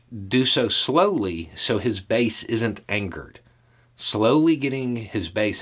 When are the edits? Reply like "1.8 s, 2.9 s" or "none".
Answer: none